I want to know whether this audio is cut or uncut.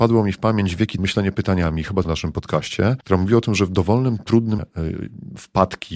cut